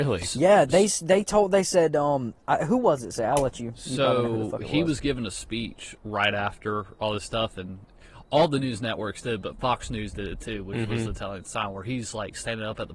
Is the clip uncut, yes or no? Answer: no